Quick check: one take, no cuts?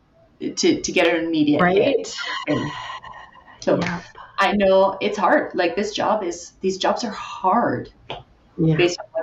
yes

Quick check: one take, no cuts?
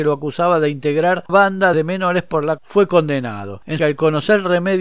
no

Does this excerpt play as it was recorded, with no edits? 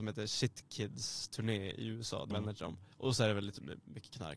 no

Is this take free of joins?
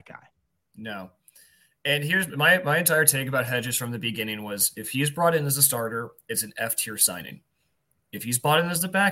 yes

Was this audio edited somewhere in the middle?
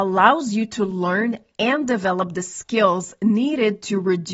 no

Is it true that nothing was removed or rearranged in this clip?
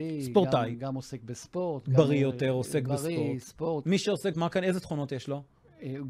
no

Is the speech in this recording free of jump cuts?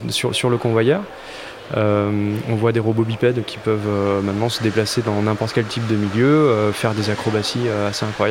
yes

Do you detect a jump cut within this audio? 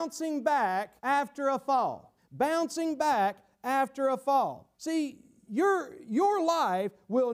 yes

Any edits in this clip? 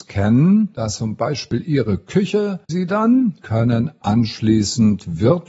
yes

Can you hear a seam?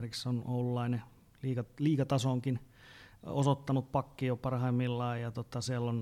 no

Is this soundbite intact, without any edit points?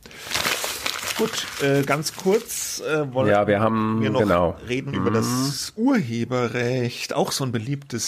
yes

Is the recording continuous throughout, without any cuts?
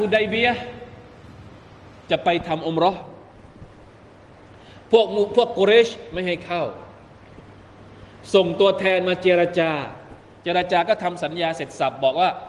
yes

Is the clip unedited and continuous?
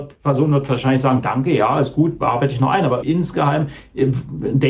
no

